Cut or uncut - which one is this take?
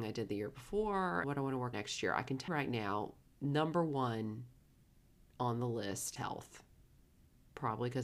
cut